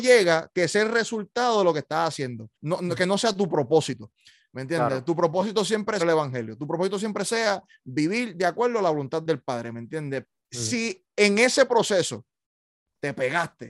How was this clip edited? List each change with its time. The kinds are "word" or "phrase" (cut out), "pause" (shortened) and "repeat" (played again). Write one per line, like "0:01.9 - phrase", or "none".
0:02.5 - pause
0:06.0 - phrase
0:09.2 - word